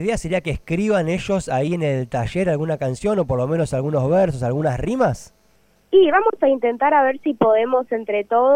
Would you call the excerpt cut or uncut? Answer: uncut